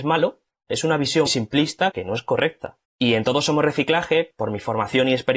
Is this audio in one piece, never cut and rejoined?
no; 4 cuts; at 1.3 s, 1.9 s, 2.8 s, 4.3 s

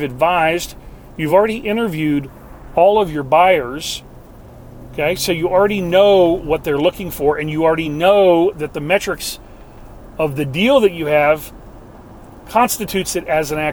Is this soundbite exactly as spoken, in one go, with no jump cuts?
yes; 0 cuts

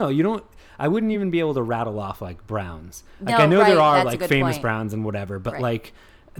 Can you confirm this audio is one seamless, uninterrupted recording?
yes; 0 cuts

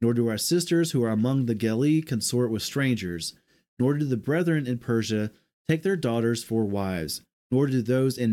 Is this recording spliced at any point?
no; 0 cuts

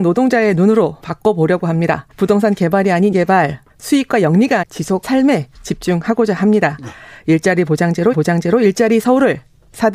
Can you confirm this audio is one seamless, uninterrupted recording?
no; 7 cuts; at 1.0 s, 2.1 s, 3.1 s, 3.7 s, 4.6 s, 5.0 s, 8.1 s

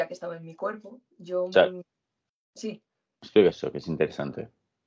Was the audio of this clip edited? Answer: yes; 1 cut; at 3.5 s

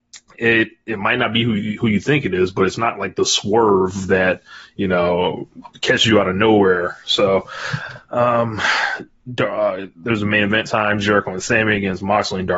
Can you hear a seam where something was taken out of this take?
no; 0 cuts

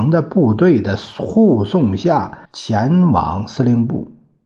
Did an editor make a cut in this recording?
yes; 1 cut; at 2.5 s

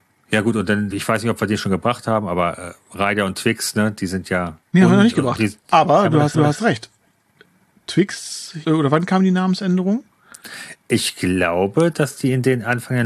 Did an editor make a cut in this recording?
yes; 4 cuts; at 0.9 s, 4.6 s, 6.3 s, 8.6 s

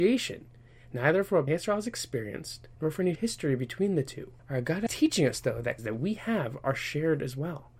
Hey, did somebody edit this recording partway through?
yes; 6 cuts; at 1.5 s, 2.7 s, 3.2 s, 4.4 s, 4.9 s, 5.8 s

